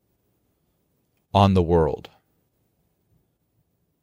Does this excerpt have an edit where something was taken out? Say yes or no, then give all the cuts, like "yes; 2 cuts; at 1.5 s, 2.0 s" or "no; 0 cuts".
no; 0 cuts